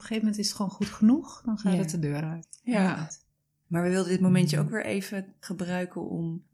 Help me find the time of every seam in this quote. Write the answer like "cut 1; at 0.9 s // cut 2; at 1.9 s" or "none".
none